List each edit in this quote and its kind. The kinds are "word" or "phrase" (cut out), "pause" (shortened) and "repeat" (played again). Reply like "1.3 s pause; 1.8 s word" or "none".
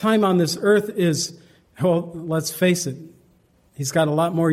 none